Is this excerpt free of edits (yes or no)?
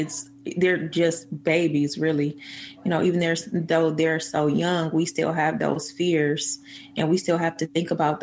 yes